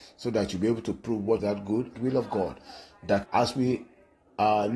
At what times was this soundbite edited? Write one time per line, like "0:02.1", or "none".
0:01.4
0:01.9
0:03.2